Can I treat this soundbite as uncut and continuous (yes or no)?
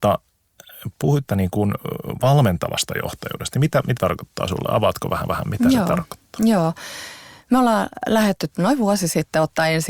no